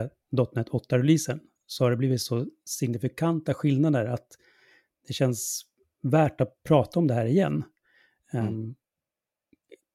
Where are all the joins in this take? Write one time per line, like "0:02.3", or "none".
none